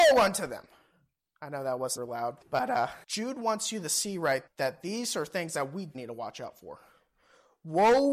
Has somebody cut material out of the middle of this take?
yes; 5 cuts; at 2.0 s, 2.4 s, 3.0 s, 4.5 s, 5.9 s

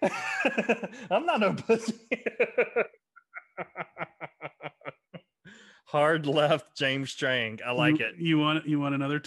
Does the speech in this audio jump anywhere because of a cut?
no; 0 cuts

